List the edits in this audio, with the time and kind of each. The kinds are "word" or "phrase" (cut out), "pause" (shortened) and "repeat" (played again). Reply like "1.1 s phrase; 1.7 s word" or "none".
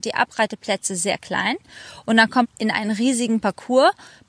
2.4 s word